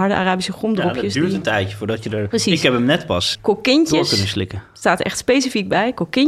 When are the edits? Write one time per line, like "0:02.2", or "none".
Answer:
0:03.3